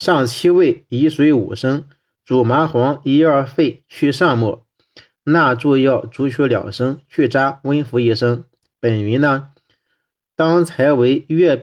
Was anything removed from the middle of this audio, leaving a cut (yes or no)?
no